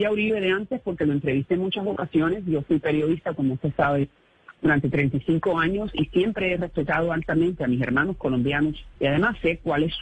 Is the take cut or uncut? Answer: cut